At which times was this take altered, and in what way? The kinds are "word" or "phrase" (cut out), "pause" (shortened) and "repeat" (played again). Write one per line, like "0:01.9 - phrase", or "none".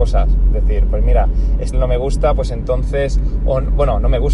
0:01.7 - word